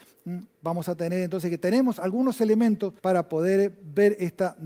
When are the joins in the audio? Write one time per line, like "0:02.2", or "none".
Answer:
0:03.0